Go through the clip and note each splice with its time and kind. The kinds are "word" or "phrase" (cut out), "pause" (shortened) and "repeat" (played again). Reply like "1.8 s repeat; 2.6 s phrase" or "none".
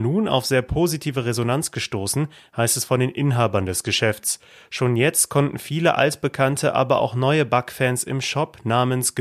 none